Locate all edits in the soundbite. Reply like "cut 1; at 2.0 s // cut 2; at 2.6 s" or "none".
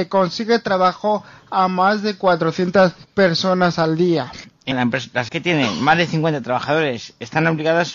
cut 1; at 4.7 s // cut 2; at 5.3 s